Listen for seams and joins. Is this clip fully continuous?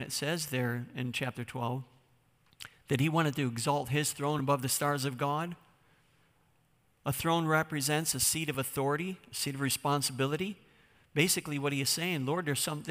yes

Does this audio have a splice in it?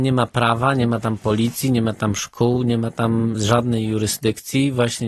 no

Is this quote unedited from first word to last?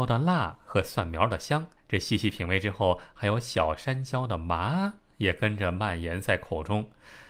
no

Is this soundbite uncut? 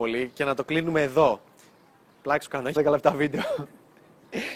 no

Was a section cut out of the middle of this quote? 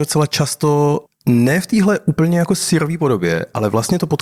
yes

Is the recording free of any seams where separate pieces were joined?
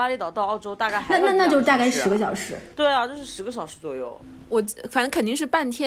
no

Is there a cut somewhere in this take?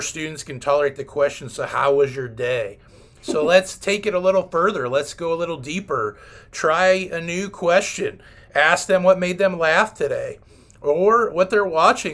no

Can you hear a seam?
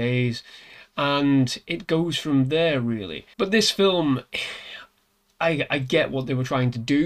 yes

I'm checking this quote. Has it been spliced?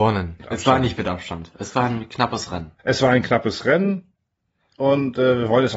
yes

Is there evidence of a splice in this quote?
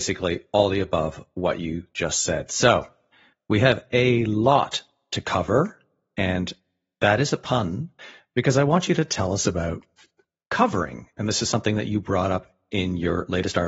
no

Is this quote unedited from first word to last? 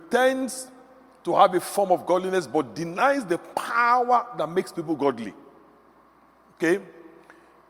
yes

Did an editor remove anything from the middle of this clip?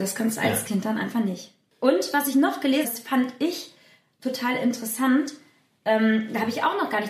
yes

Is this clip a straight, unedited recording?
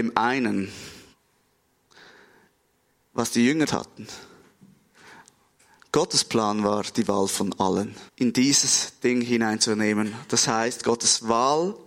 no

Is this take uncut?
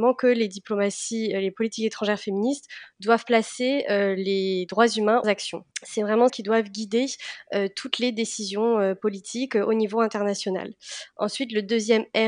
no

